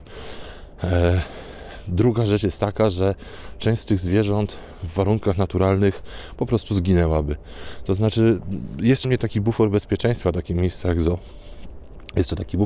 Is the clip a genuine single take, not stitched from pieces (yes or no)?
no